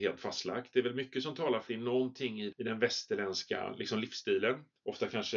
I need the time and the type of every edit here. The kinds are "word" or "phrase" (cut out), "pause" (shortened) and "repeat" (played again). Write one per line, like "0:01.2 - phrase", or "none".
0:01.7 - word
0:02.5 - word

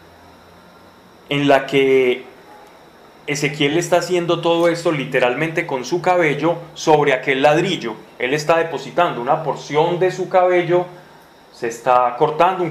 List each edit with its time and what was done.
none

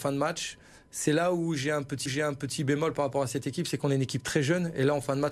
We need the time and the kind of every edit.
0:02.1 - repeat

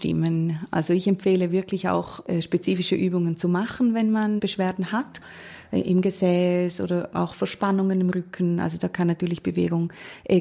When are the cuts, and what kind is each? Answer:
none

